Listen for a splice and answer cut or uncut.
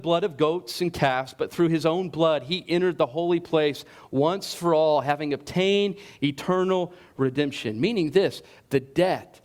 uncut